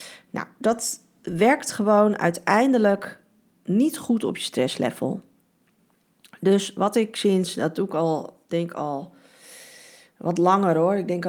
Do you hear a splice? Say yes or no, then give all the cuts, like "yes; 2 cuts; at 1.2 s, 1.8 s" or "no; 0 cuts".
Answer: no; 0 cuts